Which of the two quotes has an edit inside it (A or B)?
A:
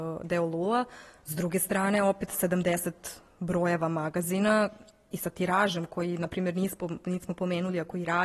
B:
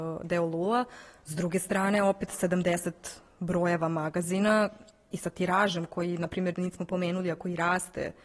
B